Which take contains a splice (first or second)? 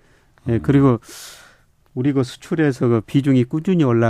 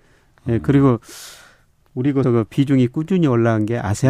second